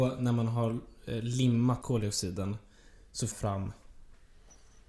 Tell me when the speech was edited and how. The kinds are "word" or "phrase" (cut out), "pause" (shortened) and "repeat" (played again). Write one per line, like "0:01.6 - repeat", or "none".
0:01.8 - word
0:03.3 - word